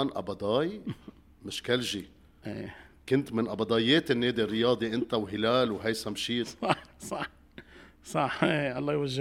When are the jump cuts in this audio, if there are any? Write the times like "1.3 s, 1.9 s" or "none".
none